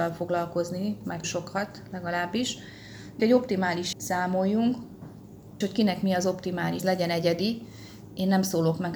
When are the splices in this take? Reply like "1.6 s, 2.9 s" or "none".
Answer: 1.2 s, 3.2 s, 3.9 s, 5.6 s, 6.8 s